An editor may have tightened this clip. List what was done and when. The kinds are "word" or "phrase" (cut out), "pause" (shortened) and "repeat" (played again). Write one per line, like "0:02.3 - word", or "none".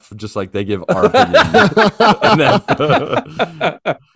none